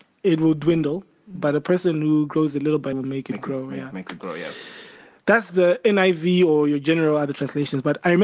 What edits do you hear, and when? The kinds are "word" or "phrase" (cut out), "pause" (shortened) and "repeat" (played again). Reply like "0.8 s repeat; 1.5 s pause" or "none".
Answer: 2.9 s word